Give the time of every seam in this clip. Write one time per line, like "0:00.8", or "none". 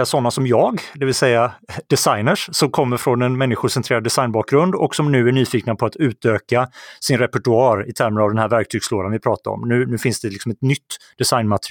none